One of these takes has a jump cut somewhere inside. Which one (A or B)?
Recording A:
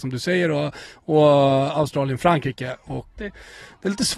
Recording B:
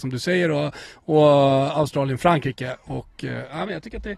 A